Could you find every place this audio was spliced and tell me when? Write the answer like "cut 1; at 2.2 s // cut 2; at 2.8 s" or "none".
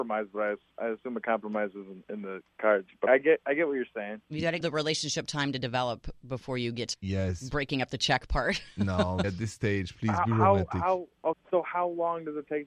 cut 1; at 2.0 s // cut 2; at 3.1 s // cut 3; at 4.2 s // cut 4; at 4.6 s // cut 5; at 6.9 s // cut 6; at 9.2 s // cut 7; at 11.3 s